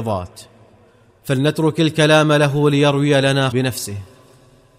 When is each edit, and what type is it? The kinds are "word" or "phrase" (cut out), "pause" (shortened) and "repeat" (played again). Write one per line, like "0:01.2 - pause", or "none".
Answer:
0:03.5 - word